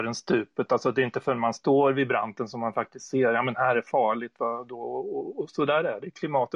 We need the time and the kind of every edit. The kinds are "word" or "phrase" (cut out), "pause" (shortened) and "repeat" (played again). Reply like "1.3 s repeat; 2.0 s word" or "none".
none